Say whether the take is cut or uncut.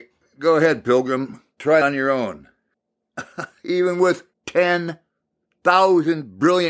cut